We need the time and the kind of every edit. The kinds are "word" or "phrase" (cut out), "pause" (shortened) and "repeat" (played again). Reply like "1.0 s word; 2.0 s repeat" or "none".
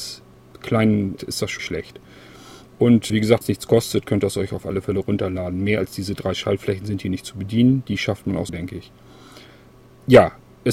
1.2 s word; 1.6 s word; 3.1 s word; 3.4 s word; 8.5 s word

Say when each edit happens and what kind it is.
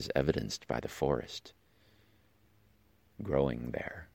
none

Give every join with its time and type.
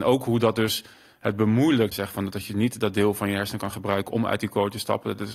1.9 s phrase

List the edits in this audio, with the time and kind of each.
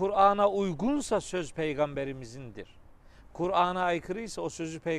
none

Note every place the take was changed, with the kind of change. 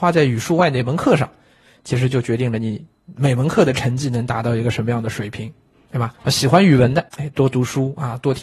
6.1 s pause; 7.1 s pause

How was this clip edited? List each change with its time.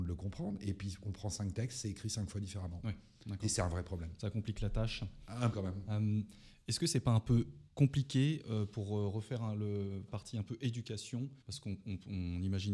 5.5 s word; 7.7 s pause; 10.1 s phrase; 11.4 s pause

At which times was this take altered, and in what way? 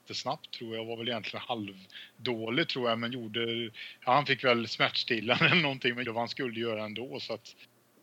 6.0 s word

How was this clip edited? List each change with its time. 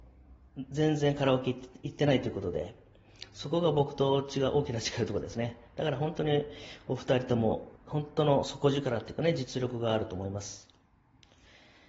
7.8 s pause

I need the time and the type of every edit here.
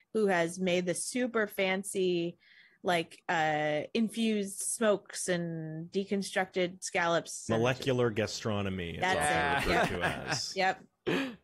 none

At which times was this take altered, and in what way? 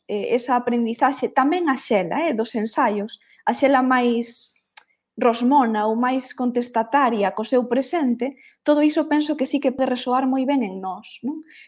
none

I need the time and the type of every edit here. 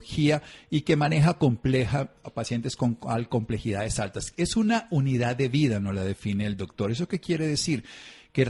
none

